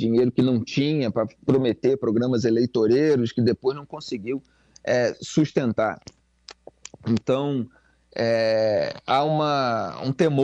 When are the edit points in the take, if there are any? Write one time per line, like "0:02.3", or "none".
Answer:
none

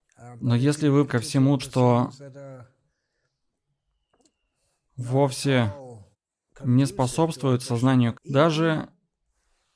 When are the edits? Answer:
0:01.1
0:01.6
0:06.1
0:08.1

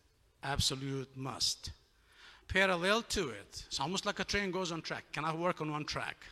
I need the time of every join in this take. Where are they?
0:02.4

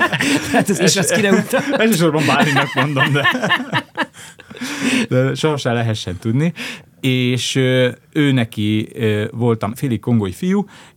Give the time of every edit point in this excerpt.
0:09.7

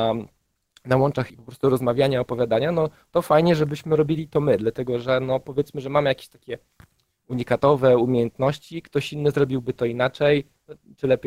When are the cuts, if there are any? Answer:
0:01.3

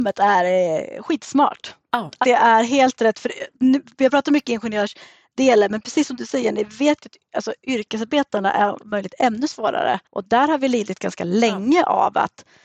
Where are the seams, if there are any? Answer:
0:02.2
0:03.5
0:08.8
0:10.0

